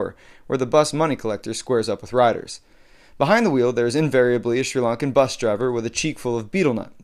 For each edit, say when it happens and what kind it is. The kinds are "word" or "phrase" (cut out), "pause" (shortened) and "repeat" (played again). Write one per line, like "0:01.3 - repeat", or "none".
none